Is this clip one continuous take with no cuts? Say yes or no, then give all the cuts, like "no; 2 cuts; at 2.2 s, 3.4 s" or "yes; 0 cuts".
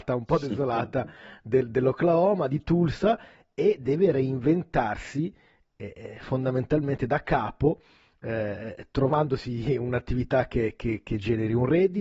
yes; 0 cuts